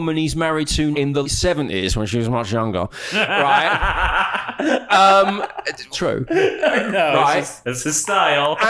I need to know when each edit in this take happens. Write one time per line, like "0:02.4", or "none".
0:00.9
0:01.2
0:05.9
0:07.6